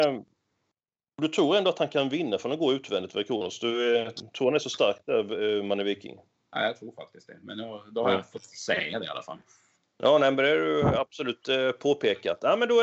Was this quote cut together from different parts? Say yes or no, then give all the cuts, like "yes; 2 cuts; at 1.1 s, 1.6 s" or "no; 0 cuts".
no; 0 cuts